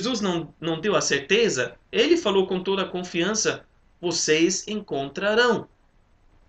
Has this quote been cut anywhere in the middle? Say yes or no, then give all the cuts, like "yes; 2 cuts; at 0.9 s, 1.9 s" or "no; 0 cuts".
no; 0 cuts